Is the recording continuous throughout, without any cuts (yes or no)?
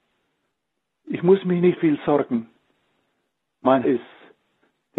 no